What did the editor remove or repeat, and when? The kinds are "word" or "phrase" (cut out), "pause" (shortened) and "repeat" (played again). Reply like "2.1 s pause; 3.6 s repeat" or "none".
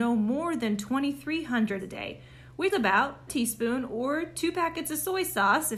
1.8 s word; 2.7 s word; 3.3 s word